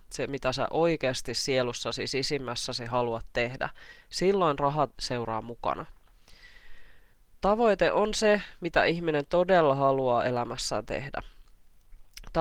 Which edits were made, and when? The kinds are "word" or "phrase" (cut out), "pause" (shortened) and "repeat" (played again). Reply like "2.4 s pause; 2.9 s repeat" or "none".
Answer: 7.1 s pause